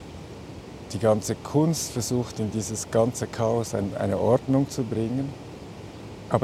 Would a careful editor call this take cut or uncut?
uncut